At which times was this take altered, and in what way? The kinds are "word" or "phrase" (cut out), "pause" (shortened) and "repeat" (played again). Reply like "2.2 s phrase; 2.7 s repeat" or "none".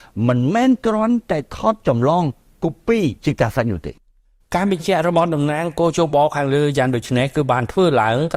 3.2 s pause